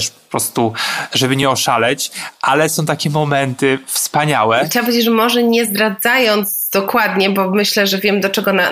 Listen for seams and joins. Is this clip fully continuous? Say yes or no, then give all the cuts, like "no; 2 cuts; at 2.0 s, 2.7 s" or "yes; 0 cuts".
yes; 0 cuts